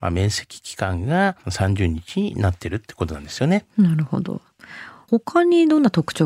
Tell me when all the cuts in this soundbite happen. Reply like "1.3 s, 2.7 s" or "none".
1.4 s